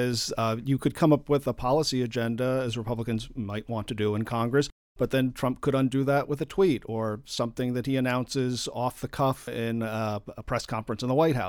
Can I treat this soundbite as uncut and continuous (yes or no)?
yes